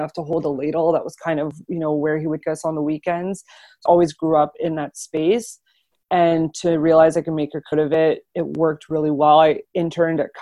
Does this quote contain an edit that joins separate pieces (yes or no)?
yes